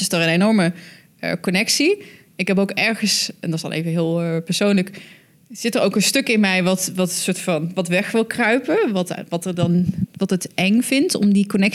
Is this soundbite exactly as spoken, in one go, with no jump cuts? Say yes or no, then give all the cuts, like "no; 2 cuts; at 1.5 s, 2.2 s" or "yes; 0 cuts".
yes; 0 cuts